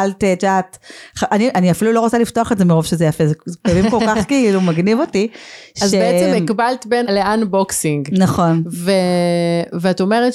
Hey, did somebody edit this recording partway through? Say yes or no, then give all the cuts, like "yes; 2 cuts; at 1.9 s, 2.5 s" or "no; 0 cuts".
yes; 1 cut; at 7.0 s